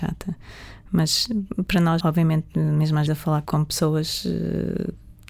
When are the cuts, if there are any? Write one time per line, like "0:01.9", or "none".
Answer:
0:02.0
0:03.1
0:03.4